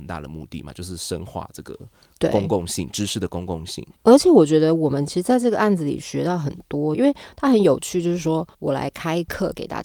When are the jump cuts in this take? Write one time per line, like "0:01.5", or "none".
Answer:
0:04.0
0:06.9
0:08.5

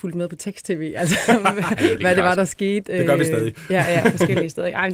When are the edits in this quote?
none

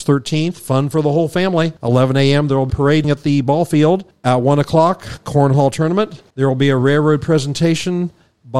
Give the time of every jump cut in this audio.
0:01.8
0:02.7
0:03.0
0:04.1
0:06.3

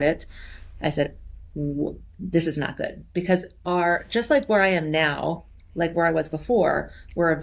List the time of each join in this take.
none

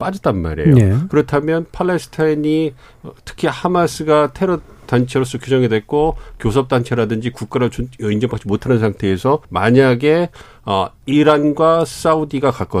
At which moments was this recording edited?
0:09.4
0:11.0

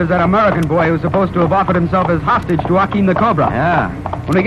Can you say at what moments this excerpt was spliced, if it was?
none

